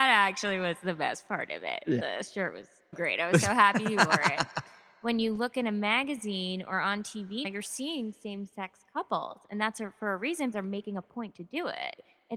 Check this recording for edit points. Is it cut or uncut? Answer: cut